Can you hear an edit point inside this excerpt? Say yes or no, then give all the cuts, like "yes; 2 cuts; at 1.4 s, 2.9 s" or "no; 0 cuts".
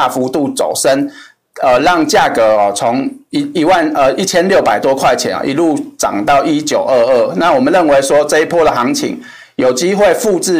no; 0 cuts